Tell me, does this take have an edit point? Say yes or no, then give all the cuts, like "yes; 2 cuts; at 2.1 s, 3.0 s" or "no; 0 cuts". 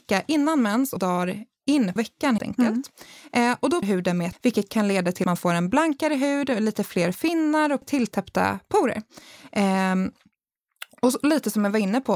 yes; 7 cuts; at 1.0 s, 2.0 s, 2.4 s, 3.8 s, 4.3 s, 5.2 s, 7.8 s